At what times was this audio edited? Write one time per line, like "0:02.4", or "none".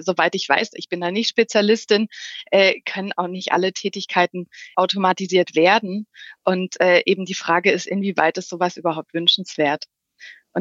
0:04.7